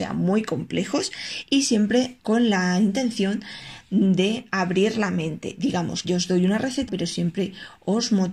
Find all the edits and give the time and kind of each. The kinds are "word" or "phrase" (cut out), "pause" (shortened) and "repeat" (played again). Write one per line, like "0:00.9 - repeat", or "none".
0:02.2 - word
0:06.0 - word
0:06.9 - word